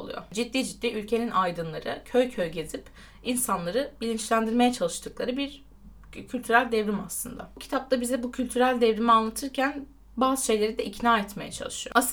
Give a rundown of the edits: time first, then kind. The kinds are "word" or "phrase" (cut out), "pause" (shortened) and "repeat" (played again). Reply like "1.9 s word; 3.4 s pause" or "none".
none